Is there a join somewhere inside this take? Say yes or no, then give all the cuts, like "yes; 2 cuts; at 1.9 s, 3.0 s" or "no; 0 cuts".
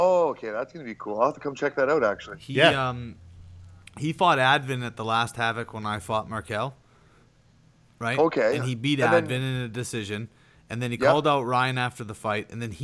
no; 0 cuts